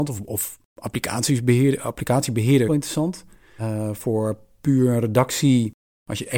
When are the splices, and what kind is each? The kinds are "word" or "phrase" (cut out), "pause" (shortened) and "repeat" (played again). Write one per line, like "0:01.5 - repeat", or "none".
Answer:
0:02.7 - phrase